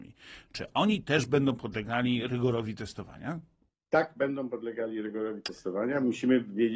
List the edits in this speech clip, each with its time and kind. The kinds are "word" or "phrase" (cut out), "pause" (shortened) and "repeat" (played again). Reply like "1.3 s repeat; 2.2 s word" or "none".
none